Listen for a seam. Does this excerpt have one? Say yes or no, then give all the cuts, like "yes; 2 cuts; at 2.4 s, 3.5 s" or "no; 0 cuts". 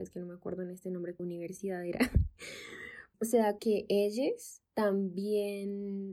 yes; 4 cuts; at 1.2 s, 3.1 s, 3.6 s, 4.7 s